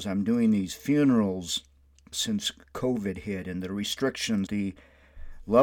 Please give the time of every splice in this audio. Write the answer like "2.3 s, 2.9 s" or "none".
2.1 s, 4.5 s